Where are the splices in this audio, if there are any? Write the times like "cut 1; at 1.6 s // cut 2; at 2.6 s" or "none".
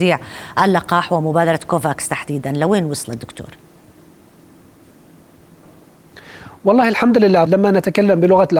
cut 1; at 7.5 s

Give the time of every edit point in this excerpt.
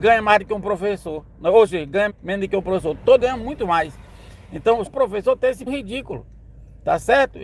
cut 1; at 2.1 s // cut 2; at 3.2 s // cut 3; at 4.9 s // cut 4; at 5.7 s

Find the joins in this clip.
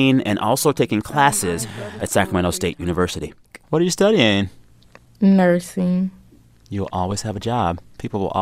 none

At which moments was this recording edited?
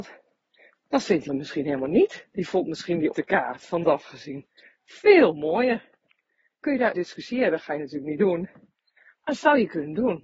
cut 1; at 1.3 s // cut 2; at 3.1 s // cut 3; at 3.8 s // cut 4; at 6.6 s // cut 5; at 6.9 s

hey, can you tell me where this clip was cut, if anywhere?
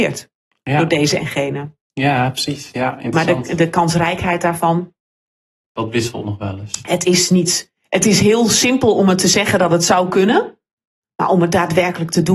none

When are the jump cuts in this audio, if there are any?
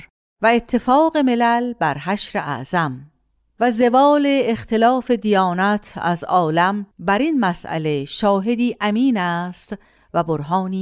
none

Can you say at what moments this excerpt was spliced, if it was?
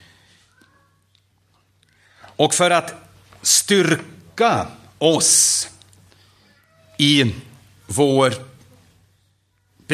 none

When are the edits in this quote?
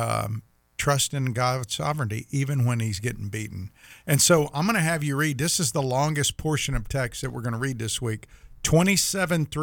none

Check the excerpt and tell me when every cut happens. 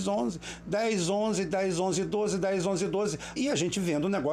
cut 1; at 3.4 s

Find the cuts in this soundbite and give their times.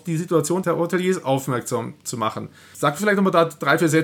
none

